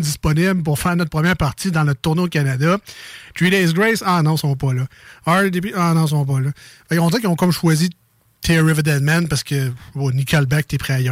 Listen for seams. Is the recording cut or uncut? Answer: uncut